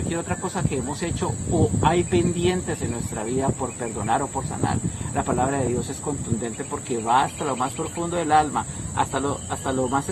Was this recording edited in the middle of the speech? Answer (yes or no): no